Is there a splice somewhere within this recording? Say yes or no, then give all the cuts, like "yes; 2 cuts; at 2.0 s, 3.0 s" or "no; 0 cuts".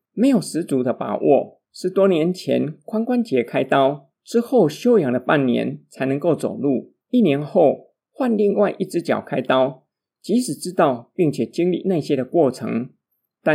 yes; 3 cuts; at 1.6 s, 4.1 s, 7.0 s